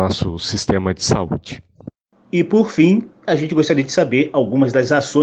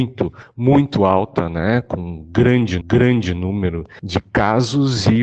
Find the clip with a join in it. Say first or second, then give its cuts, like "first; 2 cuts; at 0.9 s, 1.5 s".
second; 1 cut; at 2.8 s